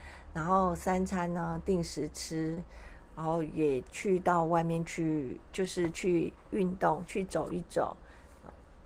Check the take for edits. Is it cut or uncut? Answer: cut